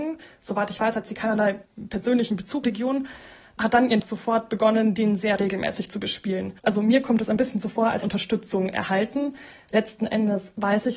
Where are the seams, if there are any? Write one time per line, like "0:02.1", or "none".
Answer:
0:02.6
0:04.0
0:06.6
0:08.0